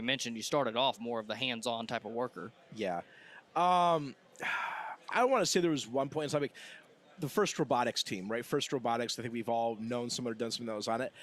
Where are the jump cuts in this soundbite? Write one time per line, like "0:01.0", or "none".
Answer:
0:05.1